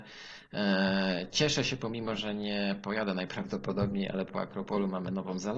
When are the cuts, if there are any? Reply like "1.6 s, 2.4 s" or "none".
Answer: none